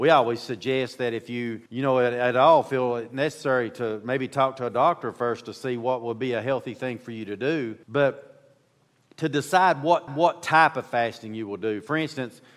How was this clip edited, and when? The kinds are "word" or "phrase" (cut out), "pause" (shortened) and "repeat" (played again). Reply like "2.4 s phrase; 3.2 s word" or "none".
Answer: 1.7 s pause; 7.8 s pause; 10.1 s repeat